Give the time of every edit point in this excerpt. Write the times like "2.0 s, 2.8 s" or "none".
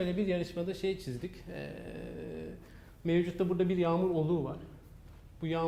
none